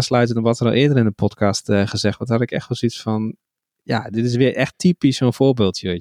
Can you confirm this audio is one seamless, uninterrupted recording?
yes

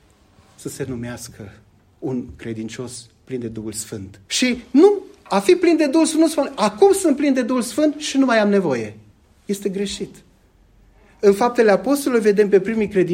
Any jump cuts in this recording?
yes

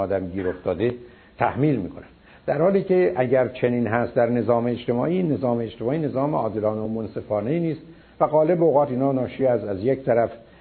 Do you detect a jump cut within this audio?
no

